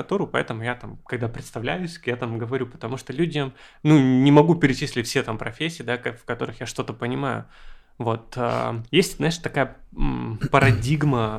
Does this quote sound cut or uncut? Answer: cut